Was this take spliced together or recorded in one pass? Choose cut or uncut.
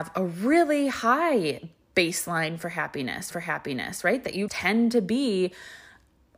cut